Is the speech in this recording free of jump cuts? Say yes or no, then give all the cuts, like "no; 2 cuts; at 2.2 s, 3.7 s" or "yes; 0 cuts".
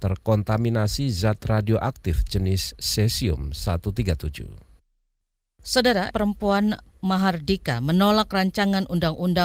no; 1 cut; at 6.1 s